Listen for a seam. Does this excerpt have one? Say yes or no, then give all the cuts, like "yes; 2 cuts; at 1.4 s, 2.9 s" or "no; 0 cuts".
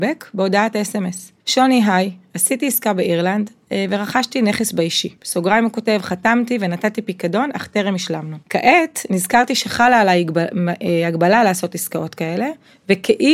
yes; 3 cuts; at 1.4 s, 5.2 s, 8.4 s